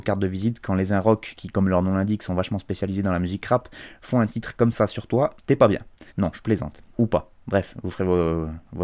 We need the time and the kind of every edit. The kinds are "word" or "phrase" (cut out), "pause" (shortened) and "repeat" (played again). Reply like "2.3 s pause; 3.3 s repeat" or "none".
5.4 s pause; 6.1 s pause; 6.9 s pause